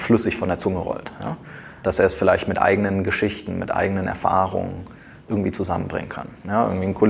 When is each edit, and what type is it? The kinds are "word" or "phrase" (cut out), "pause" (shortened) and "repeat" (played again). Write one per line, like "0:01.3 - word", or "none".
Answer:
none